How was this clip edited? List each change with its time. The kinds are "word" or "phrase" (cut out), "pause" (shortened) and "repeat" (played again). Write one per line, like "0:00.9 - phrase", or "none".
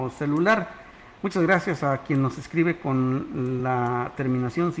none